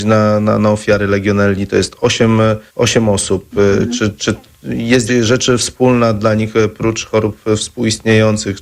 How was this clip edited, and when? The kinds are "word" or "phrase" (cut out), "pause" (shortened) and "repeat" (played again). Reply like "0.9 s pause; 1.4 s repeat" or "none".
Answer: 2.7 s pause; 5.1 s word